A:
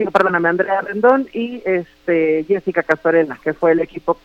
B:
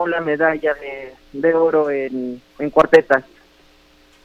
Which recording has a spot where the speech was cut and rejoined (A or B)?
B